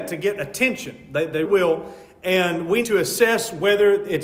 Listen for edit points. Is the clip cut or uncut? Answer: cut